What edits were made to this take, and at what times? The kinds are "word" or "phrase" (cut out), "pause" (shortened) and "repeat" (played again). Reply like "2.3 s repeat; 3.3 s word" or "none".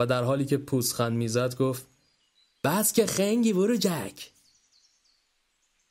none